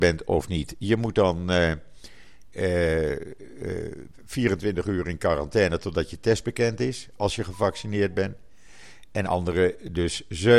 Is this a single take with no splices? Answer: yes; 0 cuts

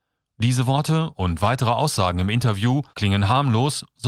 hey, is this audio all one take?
no; 1 cut; at 2.9 s

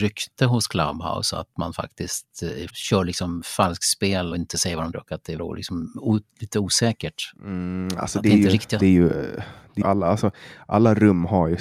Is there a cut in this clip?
yes; 6 cuts; at 2.7 s, 4.3 s, 4.9 s, 5.4 s, 8.8 s, 9.8 s

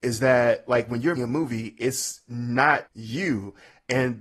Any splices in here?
yes; 2 cuts; at 1.2 s, 2.9 s

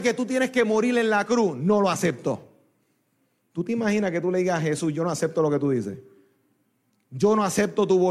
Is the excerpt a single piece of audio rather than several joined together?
yes; 0 cuts

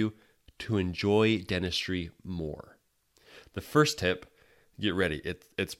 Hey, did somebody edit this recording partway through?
no; 0 cuts

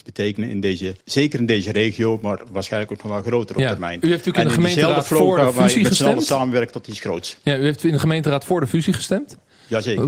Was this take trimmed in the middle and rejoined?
yes; 1 cut; at 1.0 s

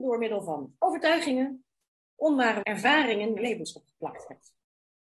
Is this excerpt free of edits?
no; 2 cuts; at 2.6 s, 3.4 s

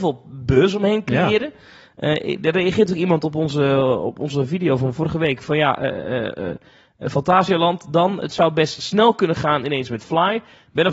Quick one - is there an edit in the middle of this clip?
no; 0 cuts

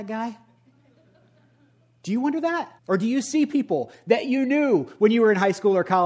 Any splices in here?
yes; 1 cut; at 2.8 s

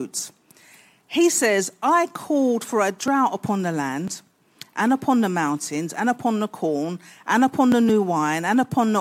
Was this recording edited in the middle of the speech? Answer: no; 0 cuts

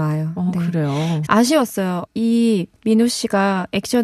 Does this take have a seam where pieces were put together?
yes; 3 cuts; at 1.3 s, 2.1 s, 2.8 s

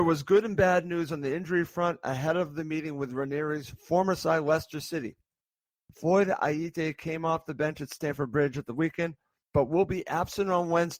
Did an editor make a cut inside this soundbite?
no; 0 cuts

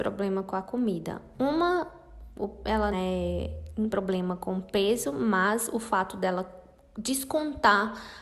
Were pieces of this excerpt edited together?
yes; 2 cuts; at 2.9 s, 3.9 s

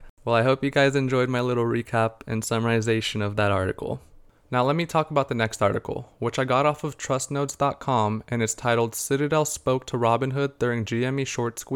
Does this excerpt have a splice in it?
no; 0 cuts

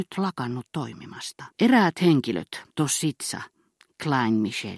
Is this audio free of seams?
no; 2 cuts; at 1.5 s, 2.7 s

